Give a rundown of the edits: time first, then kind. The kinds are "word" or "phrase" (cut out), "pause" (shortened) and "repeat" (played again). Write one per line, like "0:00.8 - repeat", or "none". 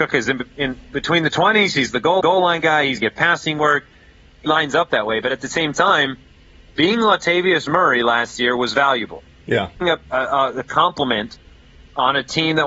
0:02.2 - repeat
0:03.0 - word
0:04.5 - word
0:09.8 - word